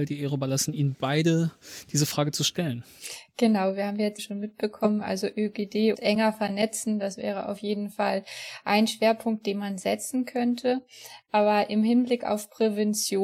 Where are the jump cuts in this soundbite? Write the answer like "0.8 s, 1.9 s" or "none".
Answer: 4.2 s, 5.9 s